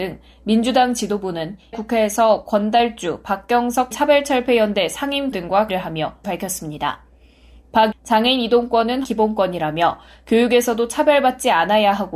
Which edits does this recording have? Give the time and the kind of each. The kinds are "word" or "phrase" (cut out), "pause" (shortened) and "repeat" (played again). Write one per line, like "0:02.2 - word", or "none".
0:01.7 - word
0:03.9 - word
0:05.3 - word
0:05.7 - word
0:06.2 - word
0:07.9 - word
0:09.0 - word